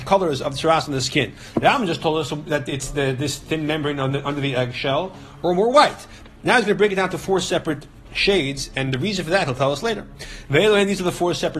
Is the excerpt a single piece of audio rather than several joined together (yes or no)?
yes